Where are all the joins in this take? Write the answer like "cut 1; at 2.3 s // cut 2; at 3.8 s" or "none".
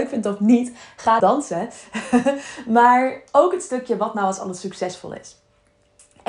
cut 1; at 1.2 s